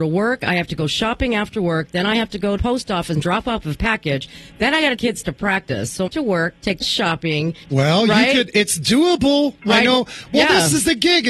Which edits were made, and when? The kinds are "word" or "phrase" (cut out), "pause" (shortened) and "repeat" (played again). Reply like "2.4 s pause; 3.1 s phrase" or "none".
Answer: 2.6 s phrase; 5.0 s phrase; 6.1 s phrase; 6.8 s phrase; 7.6 s pause